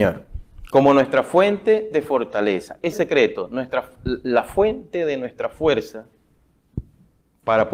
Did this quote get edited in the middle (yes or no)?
yes